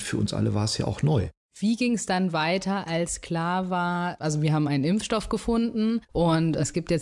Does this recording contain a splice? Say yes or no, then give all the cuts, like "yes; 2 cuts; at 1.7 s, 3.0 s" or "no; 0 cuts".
no; 0 cuts